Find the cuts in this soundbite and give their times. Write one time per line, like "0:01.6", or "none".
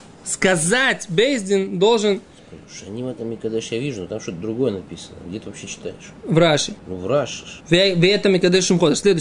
0:06.8
0:07.6